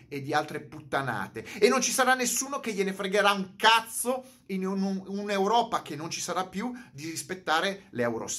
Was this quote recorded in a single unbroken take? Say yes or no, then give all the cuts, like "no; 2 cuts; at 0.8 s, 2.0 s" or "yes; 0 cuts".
yes; 0 cuts